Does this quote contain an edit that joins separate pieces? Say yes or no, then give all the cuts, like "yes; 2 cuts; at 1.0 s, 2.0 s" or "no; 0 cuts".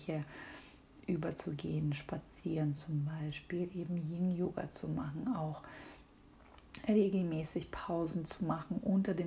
no; 0 cuts